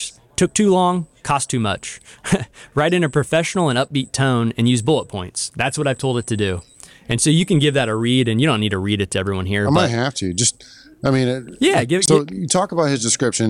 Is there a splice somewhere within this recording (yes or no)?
no